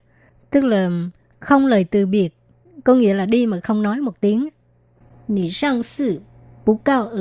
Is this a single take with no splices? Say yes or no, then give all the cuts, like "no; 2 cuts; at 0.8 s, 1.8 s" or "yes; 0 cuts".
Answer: yes; 0 cuts